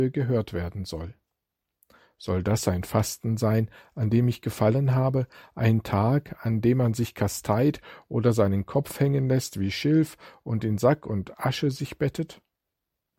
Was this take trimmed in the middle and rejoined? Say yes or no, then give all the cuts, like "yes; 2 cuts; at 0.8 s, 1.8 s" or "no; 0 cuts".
no; 0 cuts